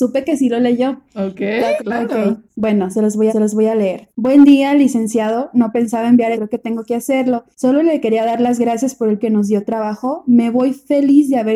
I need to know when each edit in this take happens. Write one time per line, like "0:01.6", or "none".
0:01.1
0:01.8
0:02.5
0:03.3
0:04.1
0:06.3
0:07.5
0:09.2